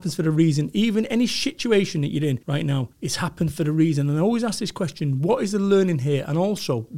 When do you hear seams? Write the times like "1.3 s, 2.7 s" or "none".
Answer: 2.4 s, 2.9 s